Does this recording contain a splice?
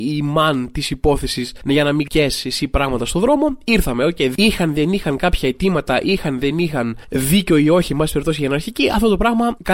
no; 0 cuts

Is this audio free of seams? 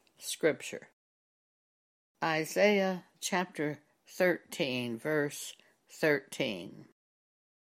yes; 0 cuts

